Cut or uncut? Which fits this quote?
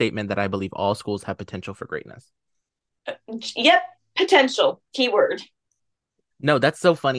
uncut